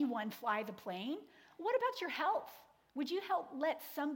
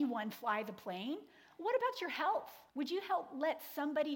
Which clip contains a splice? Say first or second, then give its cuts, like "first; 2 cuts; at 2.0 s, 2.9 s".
second; 1 cut; at 2.7 s